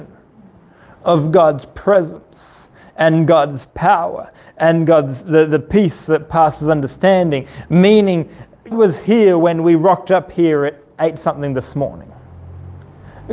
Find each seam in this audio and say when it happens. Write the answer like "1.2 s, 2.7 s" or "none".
8.7 s